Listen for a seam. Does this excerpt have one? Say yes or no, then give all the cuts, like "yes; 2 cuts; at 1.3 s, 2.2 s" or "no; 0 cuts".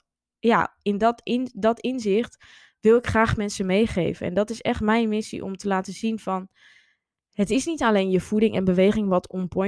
no; 0 cuts